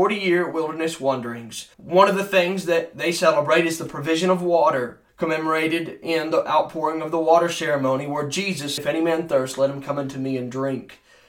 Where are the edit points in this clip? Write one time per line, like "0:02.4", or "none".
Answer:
0:01.7
0:05.1
0:08.8